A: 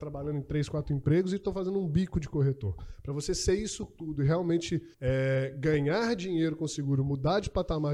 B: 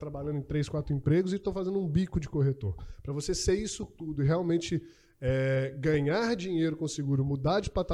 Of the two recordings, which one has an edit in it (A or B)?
A